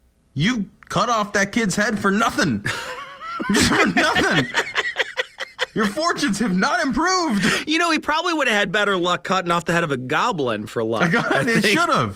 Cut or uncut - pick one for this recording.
uncut